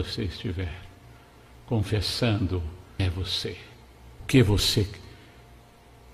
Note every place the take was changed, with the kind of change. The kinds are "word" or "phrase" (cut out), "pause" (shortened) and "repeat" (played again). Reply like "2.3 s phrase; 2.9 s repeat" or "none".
3.0 s word; 4.2 s word